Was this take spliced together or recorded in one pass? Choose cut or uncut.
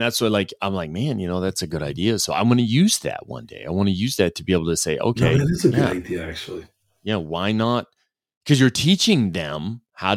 uncut